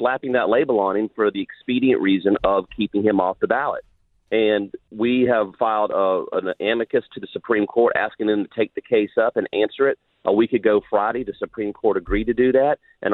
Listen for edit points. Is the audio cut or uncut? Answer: uncut